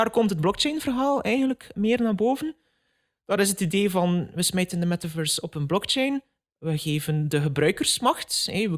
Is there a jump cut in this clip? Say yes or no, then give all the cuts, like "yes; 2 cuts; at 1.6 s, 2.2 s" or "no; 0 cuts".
no; 0 cuts